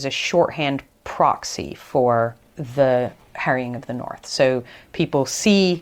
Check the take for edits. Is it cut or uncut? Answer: cut